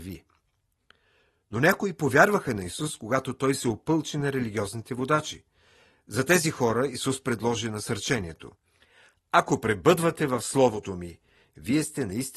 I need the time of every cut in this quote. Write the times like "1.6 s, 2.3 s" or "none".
none